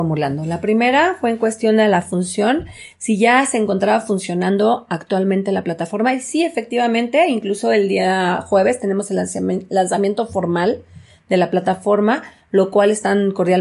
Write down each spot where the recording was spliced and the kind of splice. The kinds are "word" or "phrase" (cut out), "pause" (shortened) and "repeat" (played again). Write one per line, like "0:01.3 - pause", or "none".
none